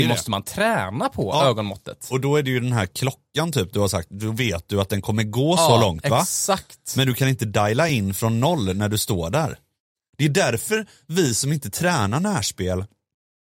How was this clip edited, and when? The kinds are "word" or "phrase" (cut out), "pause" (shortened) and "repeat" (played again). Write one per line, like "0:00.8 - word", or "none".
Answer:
none